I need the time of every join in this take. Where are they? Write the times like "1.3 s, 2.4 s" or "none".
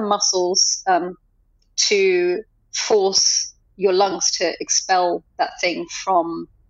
none